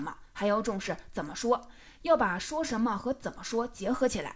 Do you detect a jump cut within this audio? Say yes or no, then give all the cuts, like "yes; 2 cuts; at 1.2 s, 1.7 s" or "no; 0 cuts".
no; 0 cuts